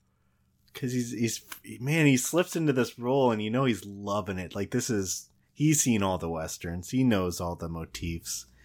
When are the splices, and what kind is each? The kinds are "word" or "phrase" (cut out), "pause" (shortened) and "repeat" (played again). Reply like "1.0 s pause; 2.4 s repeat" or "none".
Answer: none